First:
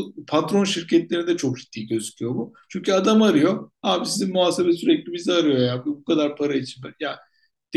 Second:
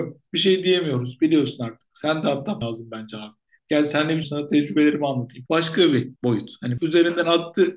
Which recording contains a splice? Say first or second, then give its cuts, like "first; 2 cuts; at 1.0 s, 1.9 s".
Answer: second; 4 cuts; at 2.6 s, 4.2 s, 6.2 s, 6.8 s